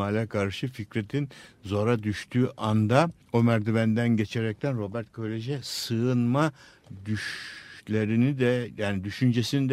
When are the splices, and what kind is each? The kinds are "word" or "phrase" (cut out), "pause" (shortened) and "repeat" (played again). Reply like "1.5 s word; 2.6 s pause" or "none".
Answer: 3.2 s pause